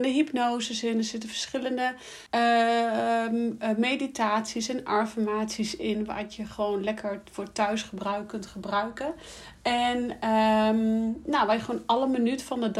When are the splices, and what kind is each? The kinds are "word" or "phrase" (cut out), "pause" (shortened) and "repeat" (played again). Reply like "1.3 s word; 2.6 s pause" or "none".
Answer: 2.3 s pause